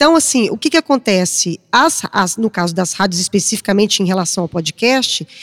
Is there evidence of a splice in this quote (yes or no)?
no